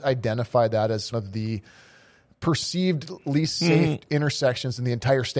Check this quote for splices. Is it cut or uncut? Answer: cut